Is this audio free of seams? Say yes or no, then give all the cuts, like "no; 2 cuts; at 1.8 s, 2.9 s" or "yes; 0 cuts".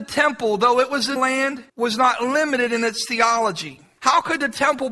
no; 2 cuts; at 1.2 s, 1.7 s